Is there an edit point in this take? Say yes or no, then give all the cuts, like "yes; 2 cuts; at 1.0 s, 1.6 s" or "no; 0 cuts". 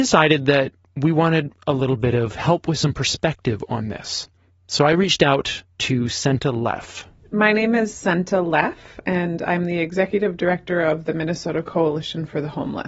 no; 0 cuts